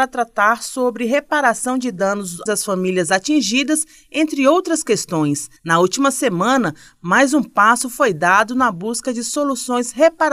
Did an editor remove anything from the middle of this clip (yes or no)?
yes